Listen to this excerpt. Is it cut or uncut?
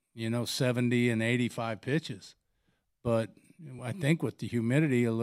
uncut